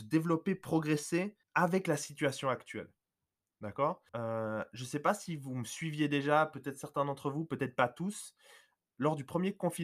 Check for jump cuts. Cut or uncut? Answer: cut